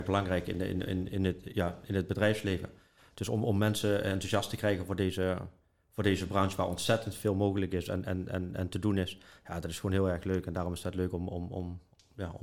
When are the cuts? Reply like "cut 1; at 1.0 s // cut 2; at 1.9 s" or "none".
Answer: none